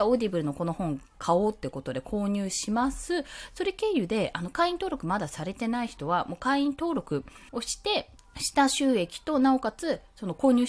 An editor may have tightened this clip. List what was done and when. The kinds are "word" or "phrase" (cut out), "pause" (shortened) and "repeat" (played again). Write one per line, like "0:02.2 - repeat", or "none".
0:07.5 - pause
0:08.2 - pause